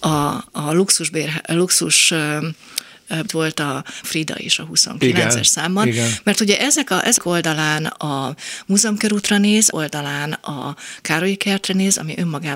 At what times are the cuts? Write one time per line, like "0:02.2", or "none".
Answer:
0:03.3
0:04.0
0:07.2
0:09.7